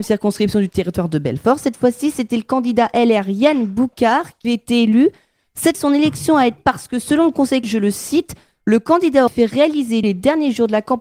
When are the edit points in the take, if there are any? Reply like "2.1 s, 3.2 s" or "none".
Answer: 4.4 s, 5.7 s, 6.6 s, 7.6 s, 9.3 s, 10.0 s

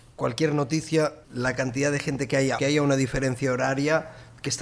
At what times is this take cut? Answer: 1.2 s, 2.6 s

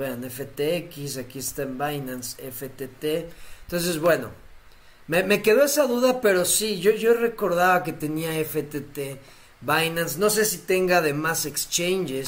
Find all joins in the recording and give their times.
none

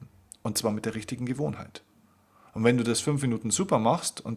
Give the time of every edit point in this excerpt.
none

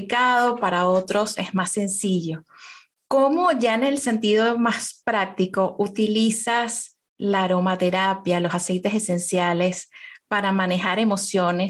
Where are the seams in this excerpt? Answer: 2.9 s

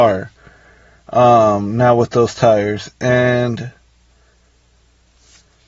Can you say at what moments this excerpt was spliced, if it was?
none

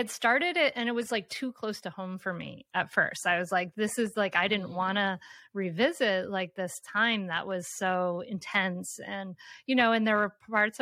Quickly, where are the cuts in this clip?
none

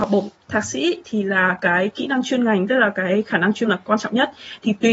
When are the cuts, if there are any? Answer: 3.6 s

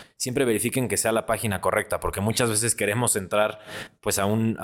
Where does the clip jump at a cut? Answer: none

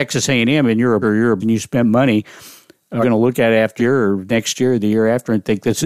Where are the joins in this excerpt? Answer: 1.0 s, 1.4 s, 3.0 s, 3.8 s

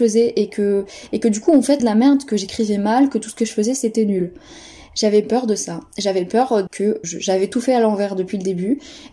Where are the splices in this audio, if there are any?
1.8 s, 6.7 s, 7.0 s

